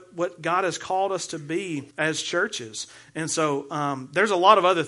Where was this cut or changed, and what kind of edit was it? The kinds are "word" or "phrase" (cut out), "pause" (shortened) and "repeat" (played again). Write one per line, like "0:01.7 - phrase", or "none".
0:01.9 - pause